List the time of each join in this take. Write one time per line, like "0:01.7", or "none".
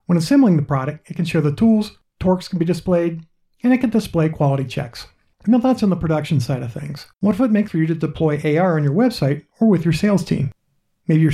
0:07.1
0:07.7

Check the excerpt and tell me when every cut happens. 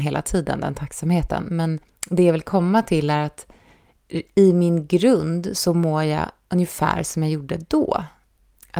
0:01.8

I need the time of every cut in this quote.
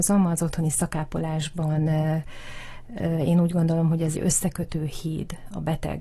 0:04.1

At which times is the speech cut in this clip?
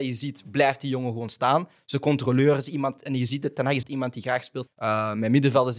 0:03.8
0:04.7

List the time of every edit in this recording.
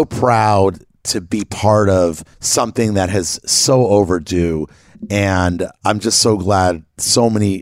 0:02.3

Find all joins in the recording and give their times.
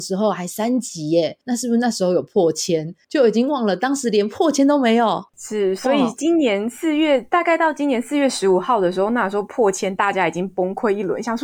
0:01.4
0:03.0
0:05.3

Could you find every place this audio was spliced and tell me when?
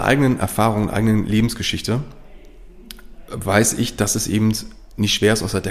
none

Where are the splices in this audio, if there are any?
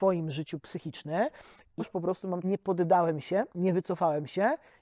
0:01.8
0:02.4

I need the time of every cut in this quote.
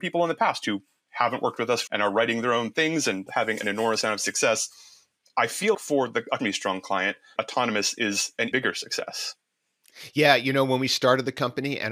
0:01.9
0:03.3
0:05.7
0:06.4
0:07.4
0:08.5

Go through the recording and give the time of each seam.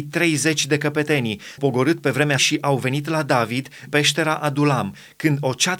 0:01.6
0:02.4
0:03.9

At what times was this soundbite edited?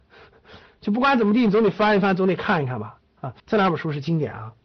0:03.4

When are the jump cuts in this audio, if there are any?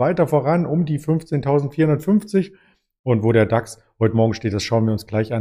none

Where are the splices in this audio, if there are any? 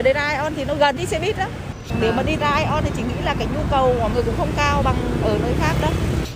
0:01.0
0:02.4
0:04.1

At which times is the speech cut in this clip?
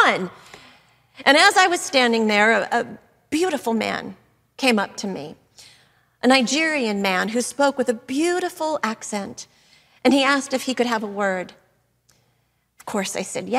none

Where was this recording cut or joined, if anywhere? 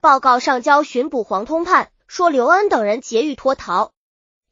0:02.0

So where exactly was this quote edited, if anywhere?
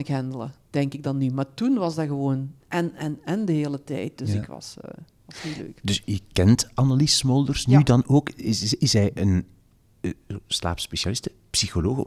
none

